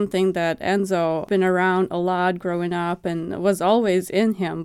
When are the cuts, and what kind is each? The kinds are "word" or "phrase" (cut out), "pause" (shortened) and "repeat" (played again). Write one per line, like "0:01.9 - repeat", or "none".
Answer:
none